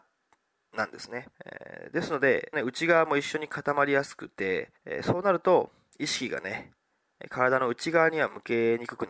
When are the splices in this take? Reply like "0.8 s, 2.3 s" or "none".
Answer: 1.3 s, 2.5 s, 4.8 s